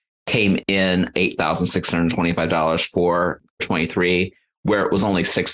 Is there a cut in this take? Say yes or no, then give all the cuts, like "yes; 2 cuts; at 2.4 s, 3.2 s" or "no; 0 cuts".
yes; 2 cuts; at 1.1 s, 3.6 s